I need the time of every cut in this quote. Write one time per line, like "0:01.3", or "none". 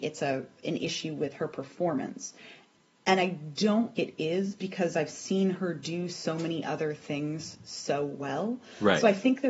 0:04.0